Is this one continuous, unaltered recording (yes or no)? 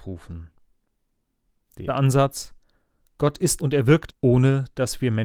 no